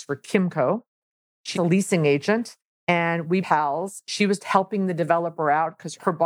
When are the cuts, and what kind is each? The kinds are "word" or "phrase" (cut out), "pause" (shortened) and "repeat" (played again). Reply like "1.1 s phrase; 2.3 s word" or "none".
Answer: 1.6 s word; 3.4 s word; 4.4 s word